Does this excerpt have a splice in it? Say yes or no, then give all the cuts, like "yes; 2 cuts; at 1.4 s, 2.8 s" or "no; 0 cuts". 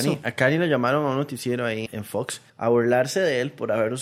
yes; 2 cuts; at 1.9 s, 2.5 s